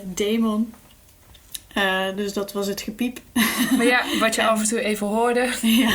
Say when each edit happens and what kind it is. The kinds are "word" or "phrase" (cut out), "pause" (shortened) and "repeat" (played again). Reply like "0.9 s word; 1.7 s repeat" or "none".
none

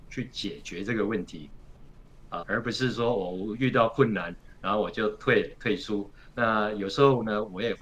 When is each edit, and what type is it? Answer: 2.4 s word

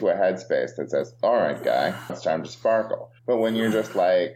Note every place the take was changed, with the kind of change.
2.1 s word; 3.2 s pause

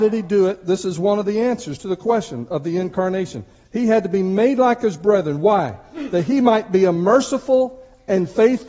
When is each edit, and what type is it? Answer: none

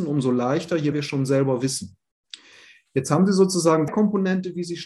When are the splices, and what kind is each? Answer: 0.9 s word; 3.9 s word

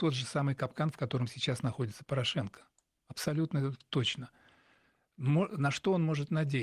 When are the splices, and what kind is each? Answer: none

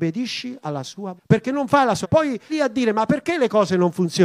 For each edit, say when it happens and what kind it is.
1.2 s word; 2.0 s word; 2.5 s word

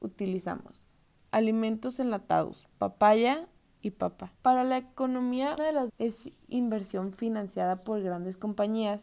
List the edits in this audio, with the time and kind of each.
0.9 s pause; 3.8 s word; 4.3 s pause; 5.6 s word; 5.9 s word

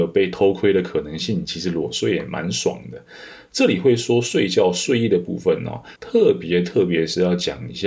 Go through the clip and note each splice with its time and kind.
6.0 s pause

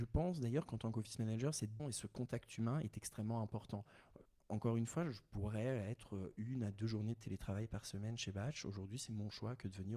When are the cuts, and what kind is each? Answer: 1.8 s word

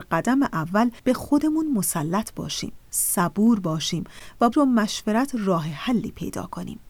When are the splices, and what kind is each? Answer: 1.0 s pause; 4.5 s phrase

